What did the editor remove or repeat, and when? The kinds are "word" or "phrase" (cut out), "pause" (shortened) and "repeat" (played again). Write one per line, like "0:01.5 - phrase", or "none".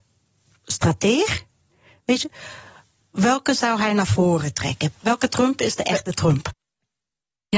none